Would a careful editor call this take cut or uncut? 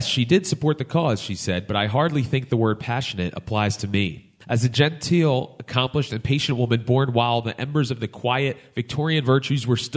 cut